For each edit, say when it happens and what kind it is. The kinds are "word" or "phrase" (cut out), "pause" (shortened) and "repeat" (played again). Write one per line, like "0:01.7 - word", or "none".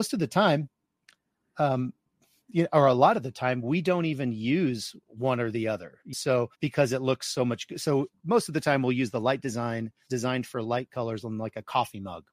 0:05.0 - pause
0:06.1 - word
0:06.6 - pause
0:10.1 - phrase